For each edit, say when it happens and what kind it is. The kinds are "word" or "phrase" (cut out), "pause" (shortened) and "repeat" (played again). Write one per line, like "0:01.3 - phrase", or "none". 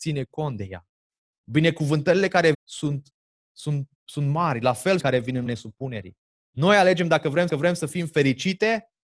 0:02.5 - phrase
0:03.9 - pause
0:05.0 - phrase
0:05.5 - word
0:06.4 - pause
0:07.5 - repeat

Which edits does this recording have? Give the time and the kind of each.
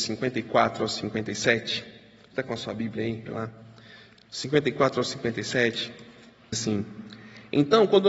0:02.3 - word
0:03.2 - word
0:06.5 - word

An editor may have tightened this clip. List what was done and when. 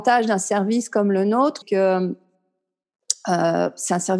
0:01.6 - word

